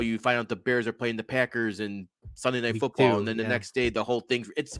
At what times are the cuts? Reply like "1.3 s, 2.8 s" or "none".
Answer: none